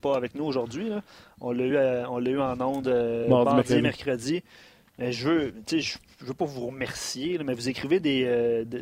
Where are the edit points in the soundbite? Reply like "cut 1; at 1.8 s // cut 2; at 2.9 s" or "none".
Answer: none